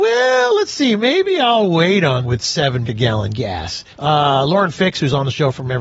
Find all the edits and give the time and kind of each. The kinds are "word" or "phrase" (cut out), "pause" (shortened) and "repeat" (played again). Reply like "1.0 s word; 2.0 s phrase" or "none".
2.2 s word; 2.8 s word; 3.9 s pause